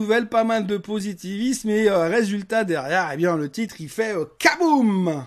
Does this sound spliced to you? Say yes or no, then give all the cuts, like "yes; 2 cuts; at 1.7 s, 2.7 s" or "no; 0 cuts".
no; 0 cuts